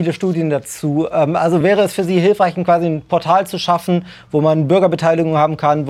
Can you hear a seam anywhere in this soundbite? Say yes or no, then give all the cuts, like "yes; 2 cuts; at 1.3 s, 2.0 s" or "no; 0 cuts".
no; 0 cuts